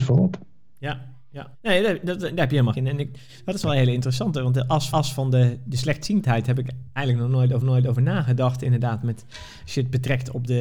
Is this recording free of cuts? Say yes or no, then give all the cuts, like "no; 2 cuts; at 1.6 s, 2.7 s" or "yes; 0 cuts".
no; 5 cuts; at 1.5 s, 2.7 s, 4.9 s, 5.7 s, 7.6 s